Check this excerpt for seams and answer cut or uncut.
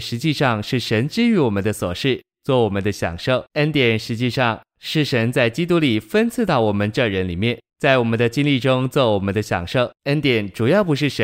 cut